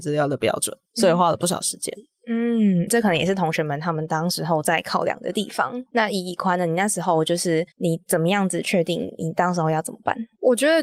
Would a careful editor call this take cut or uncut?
cut